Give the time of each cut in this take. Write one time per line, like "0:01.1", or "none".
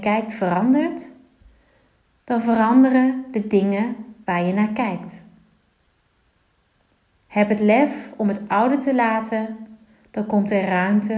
none

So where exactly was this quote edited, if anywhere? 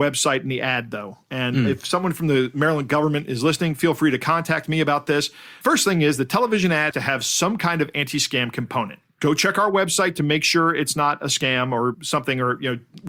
0:06.9

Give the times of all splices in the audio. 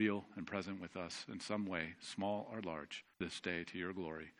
0:03.1

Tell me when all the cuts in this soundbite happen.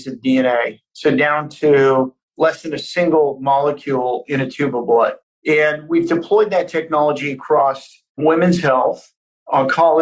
none

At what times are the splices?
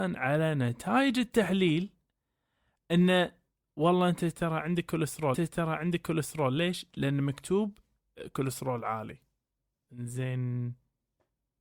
0:05.3

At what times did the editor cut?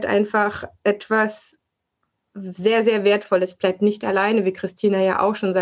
none

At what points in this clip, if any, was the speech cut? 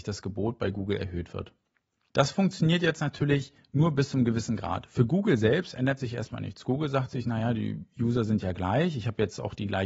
none

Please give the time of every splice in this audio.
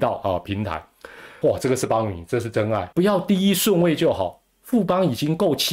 0:01.4
0:02.9

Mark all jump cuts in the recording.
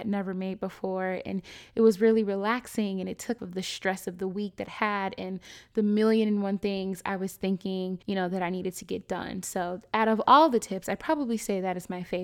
0:03.4
0:04.7
0:08.0

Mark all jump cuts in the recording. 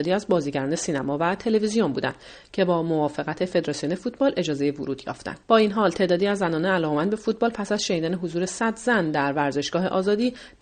0:05.4

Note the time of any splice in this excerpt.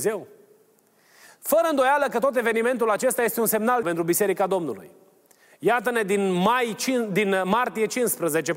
0:03.8

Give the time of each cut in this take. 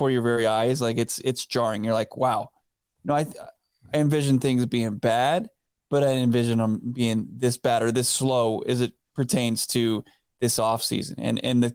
none

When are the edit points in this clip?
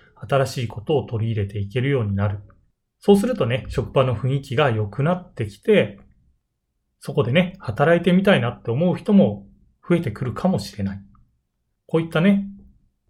none

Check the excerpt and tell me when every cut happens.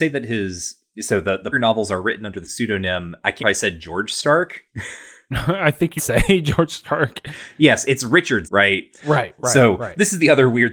0:01.5
0:02.4
0:03.4
0:06.0
0:08.4

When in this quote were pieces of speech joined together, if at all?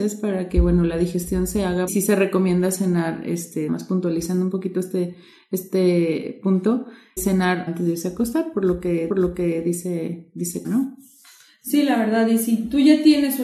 0:01.9
0:03.7
0:07.2
0:07.7
0:09.1
0:10.6

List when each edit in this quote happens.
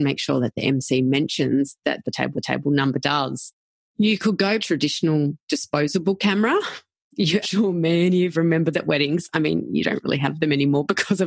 0:02.0
0:02.3
0:04.6
0:07.4
0:08.3
0:08.7

